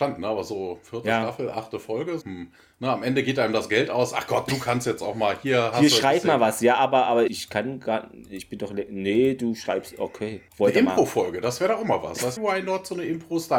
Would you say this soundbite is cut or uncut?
cut